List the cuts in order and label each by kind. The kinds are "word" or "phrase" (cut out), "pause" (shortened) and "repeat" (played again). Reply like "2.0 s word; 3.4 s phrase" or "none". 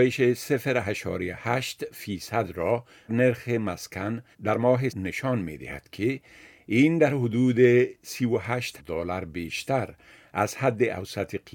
3.1 s word; 4.3 s pause; 4.9 s word; 8.8 s word

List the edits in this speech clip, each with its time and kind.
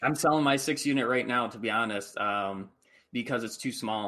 none

